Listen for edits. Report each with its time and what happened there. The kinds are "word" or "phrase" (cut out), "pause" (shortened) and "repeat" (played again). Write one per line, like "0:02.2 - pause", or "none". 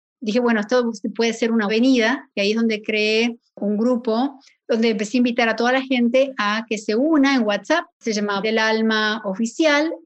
0:01.7 - word
0:07.9 - pause
0:08.4 - word